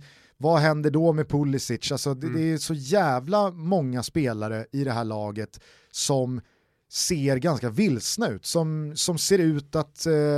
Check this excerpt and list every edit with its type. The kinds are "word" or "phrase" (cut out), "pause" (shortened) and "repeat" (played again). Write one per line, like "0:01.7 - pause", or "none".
none